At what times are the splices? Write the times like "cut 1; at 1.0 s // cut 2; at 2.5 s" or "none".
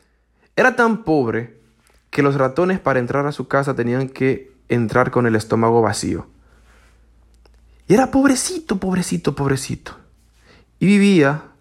none